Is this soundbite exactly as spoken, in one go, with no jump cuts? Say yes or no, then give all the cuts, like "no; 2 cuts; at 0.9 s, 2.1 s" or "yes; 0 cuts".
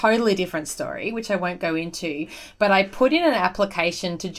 yes; 0 cuts